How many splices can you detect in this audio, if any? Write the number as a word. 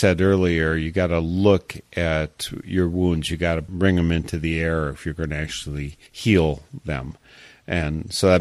one